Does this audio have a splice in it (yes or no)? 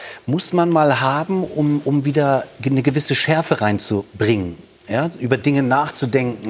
no